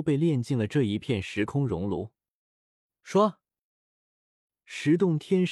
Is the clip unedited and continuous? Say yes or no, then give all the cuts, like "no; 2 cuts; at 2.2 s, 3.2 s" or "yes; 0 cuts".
yes; 0 cuts